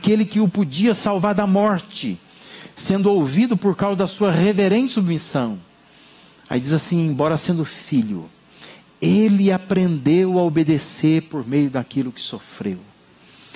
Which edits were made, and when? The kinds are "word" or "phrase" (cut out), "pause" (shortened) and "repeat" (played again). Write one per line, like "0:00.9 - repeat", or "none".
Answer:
none

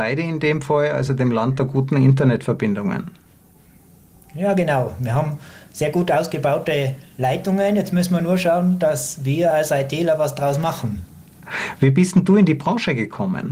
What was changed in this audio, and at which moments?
none

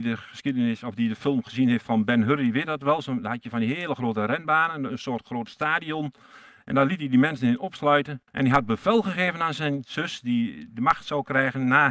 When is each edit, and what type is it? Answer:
0:08.3 - pause

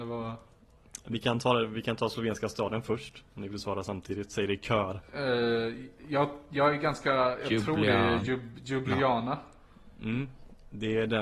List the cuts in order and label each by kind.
none

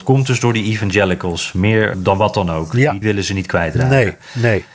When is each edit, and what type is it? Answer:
0:01.9 - word
0:03.0 - word

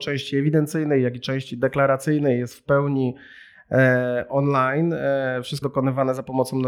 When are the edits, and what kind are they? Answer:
0:05.6 - word

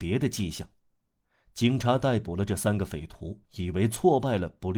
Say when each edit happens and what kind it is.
0:03.5 - pause

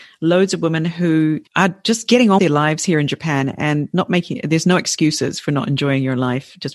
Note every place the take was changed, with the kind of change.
0:01.5 - pause
0:02.4 - word

